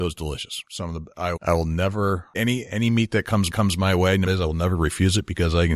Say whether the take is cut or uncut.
cut